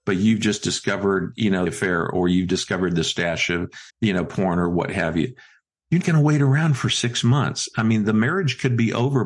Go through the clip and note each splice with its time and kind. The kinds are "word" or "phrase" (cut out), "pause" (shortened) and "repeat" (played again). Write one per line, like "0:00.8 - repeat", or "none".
0:01.7 - word
0:03.9 - pause
0:06.0 - word

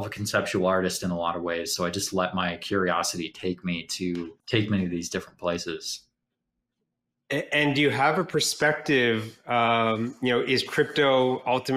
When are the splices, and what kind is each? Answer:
0:04.4 - pause

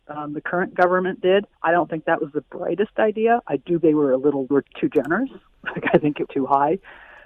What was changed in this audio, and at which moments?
0:01.5 - pause
0:03.8 - word
0:04.5 - word
0:06.3 - word

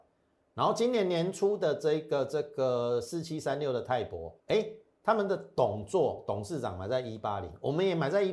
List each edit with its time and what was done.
0:04.4 - pause

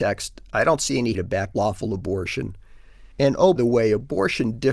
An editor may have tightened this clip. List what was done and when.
0:01.1 - word
0:01.5 - word
0:03.1 - pause
0:03.6 - word

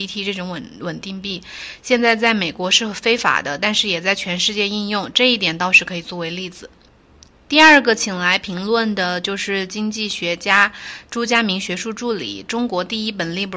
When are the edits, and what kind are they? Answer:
none

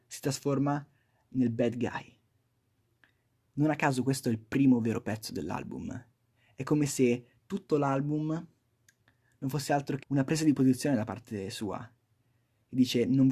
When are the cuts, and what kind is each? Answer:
0:10.0 - word

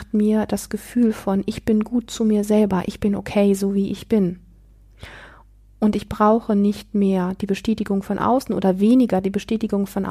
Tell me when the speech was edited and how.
none

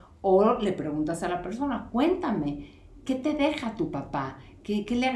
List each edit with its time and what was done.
0:03.1 - word

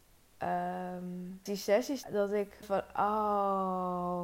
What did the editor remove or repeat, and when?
0:01.5 - word
0:02.0 - word
0:02.6 - word

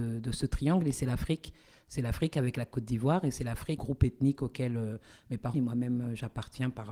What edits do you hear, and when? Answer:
0:03.8 - phrase
0:05.5 - word

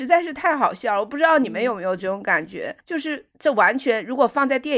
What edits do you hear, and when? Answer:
0:02.8 - pause

